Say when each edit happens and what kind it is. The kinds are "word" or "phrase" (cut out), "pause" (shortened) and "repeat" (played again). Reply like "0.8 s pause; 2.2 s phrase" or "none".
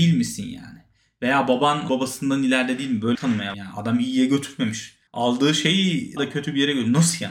1.9 s word; 3.1 s word; 3.5 s word; 5.1 s pause; 6.2 s word